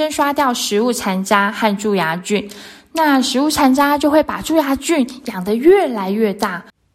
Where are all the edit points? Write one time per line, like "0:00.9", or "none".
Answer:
none